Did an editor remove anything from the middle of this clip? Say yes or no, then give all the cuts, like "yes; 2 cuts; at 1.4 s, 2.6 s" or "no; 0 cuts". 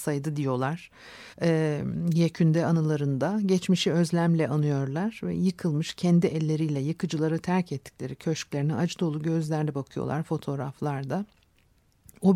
yes; 1 cut; at 1.3 s